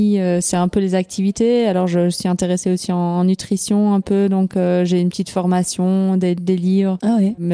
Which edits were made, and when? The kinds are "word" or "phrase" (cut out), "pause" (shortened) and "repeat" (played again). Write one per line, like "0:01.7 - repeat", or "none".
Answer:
none

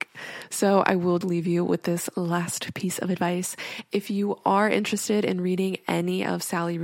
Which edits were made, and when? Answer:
0:01.2 - word

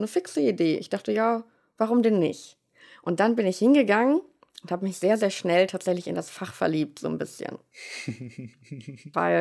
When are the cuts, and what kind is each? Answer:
none

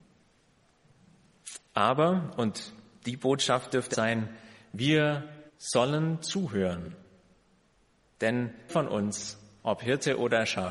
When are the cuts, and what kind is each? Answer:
0:01.7 - pause
0:03.9 - word
0:05.5 - pause
0:08.7 - word

